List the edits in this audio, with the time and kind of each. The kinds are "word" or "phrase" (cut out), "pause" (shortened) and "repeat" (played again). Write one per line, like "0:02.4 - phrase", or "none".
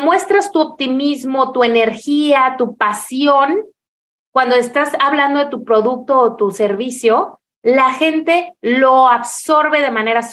none